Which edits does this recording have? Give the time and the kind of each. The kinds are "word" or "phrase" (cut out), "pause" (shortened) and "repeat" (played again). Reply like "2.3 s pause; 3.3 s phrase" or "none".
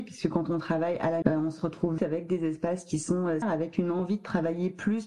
1.2 s word; 2.0 s word; 3.4 s word